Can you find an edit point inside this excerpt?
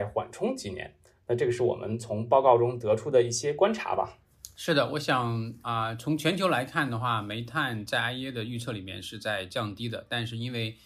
no; 0 cuts

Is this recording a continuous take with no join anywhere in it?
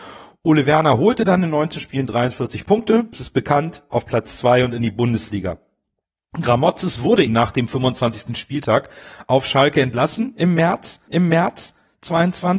no; 3 cuts; at 3.1 s, 7.3 s, 11.1 s

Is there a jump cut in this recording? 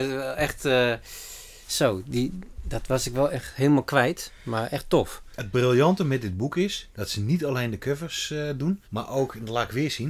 yes; 2 cuts; at 6.9 s, 8.8 s

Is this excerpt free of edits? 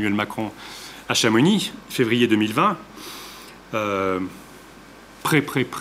yes; 0 cuts

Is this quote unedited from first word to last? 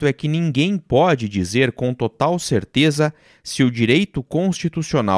yes; 0 cuts

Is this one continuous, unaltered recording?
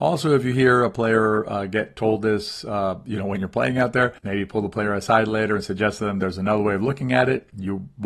no; 1 cut; at 4.2 s

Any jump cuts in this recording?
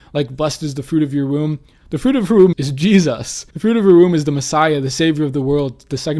yes; 2 cuts; at 2.5 s, 3.5 s

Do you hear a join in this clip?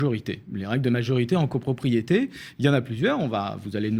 no; 0 cuts

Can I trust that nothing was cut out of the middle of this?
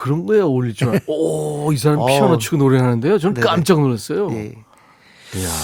yes; 0 cuts

